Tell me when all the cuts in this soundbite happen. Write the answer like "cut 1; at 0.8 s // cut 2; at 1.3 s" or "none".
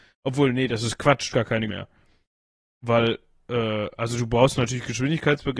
cut 1; at 1.3 s // cut 2; at 1.7 s